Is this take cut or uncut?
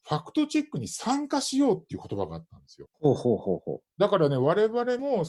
cut